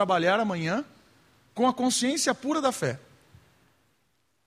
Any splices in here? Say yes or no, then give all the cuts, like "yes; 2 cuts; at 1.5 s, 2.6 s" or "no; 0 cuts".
no; 0 cuts